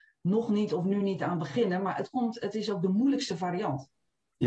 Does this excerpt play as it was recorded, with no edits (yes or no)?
yes